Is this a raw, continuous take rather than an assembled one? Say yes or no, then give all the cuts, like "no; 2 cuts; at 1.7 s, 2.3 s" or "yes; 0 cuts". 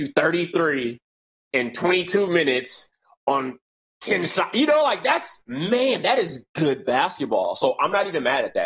yes; 0 cuts